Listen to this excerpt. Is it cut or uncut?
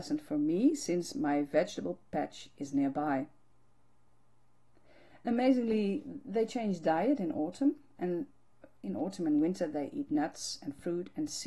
uncut